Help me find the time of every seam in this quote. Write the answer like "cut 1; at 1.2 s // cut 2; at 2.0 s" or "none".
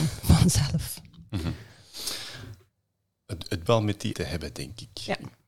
cut 1; at 3.7 s // cut 2; at 4.1 s